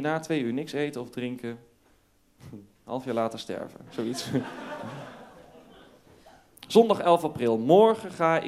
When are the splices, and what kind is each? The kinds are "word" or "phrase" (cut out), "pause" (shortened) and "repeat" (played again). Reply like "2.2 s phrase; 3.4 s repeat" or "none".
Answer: none

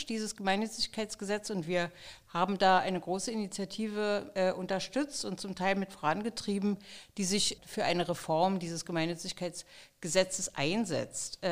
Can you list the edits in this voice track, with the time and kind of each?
7.6 s word

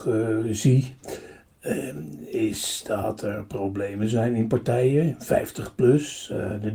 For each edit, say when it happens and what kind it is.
none

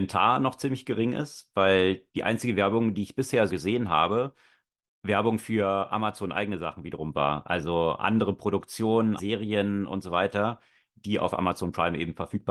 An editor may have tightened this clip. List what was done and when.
3.5 s word; 9.2 s word

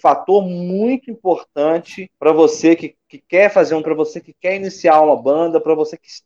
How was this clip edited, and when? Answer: 2.1 s pause; 3.8 s word

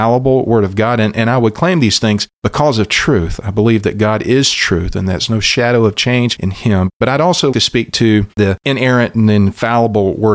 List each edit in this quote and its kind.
6.9 s pause; 7.5 s word

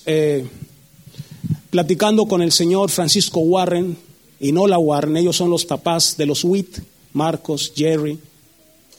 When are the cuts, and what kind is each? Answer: none

